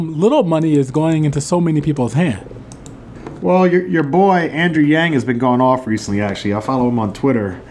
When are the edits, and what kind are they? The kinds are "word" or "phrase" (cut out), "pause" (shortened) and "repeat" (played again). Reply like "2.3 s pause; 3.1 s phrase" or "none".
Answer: none